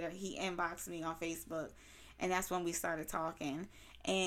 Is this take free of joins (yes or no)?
yes